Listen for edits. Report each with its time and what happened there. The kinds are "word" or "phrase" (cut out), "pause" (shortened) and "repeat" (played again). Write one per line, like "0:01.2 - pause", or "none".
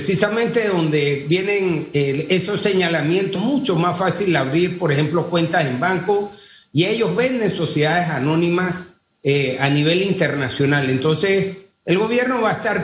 0:03.4 - word